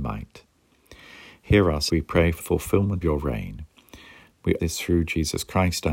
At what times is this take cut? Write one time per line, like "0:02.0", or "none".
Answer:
0:01.9
0:02.4
0:03.0
0:04.6